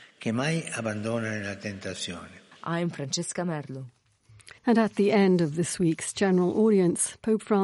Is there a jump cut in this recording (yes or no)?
yes